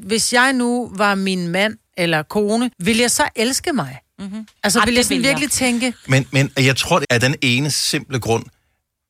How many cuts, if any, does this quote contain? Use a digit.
3